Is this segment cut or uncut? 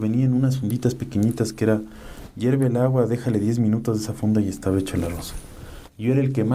uncut